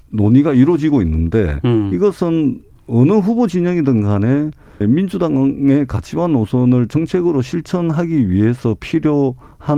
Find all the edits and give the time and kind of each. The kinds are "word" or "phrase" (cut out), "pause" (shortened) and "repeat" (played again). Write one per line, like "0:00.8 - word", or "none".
0:04.8 - word